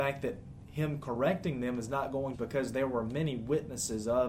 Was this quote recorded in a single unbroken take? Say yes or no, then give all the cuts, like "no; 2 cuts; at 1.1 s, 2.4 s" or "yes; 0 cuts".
no; 1 cut; at 2.3 s